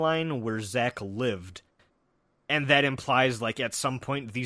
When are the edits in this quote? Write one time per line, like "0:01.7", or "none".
none

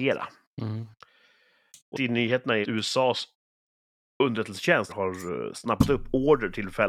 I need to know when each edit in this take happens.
0:01.9
0:02.6
0:04.9

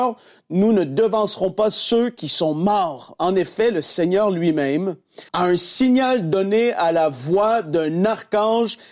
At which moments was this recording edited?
0:05.3

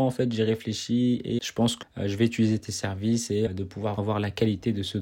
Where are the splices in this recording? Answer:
0:01.4
0:01.8
0:03.5
0:04.0

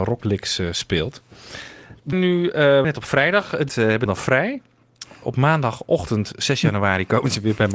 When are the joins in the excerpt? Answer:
0:02.1
0:02.8
0:03.7
0:04.1

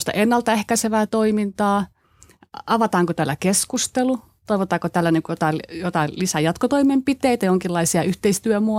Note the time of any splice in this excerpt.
none

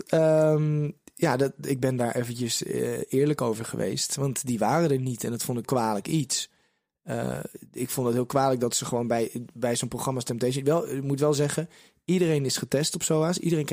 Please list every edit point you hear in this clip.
0:05.6

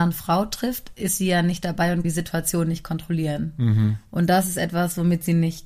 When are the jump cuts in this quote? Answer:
0:02.0

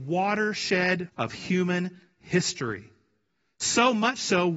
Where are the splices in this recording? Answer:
0:01.1

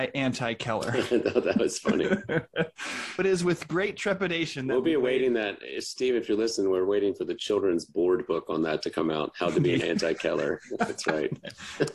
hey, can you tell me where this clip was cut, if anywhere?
0:03.2
0:09.8

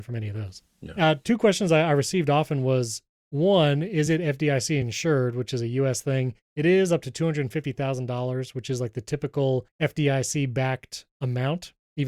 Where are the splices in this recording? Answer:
none

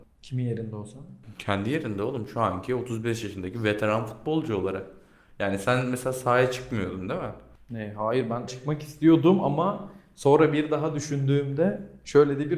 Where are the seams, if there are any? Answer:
0:08.5

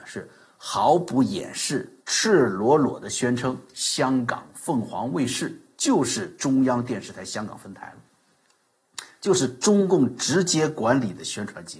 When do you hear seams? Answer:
0:02.0

